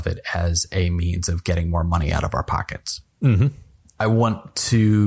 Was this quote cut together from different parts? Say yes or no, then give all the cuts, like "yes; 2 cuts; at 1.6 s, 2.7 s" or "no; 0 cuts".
yes; 1 cut; at 3.1 s